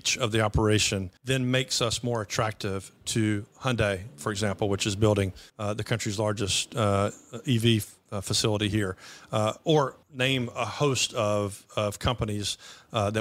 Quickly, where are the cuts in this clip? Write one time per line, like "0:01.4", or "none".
0:01.2
0:05.5
0:10.0